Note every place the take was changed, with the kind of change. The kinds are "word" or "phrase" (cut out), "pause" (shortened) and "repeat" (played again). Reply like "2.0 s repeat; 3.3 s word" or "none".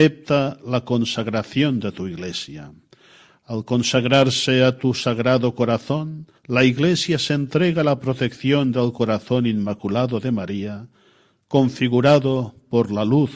6.4 s pause